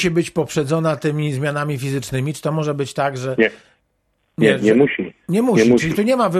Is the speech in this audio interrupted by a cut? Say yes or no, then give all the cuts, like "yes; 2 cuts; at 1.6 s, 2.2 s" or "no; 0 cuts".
no; 0 cuts